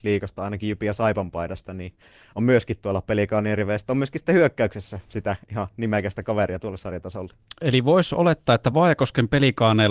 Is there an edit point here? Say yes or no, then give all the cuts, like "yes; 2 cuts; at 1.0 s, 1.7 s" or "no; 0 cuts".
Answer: no; 0 cuts